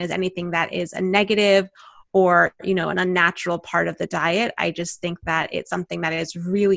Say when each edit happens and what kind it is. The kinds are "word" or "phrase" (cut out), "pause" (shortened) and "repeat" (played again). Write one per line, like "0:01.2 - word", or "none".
none